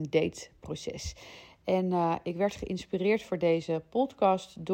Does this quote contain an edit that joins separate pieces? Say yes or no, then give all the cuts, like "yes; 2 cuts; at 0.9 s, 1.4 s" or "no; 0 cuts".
no; 0 cuts